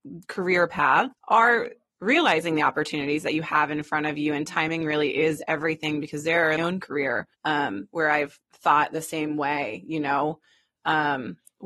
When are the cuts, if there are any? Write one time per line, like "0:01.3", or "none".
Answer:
0:01.1
0:06.6
0:07.3
0:08.4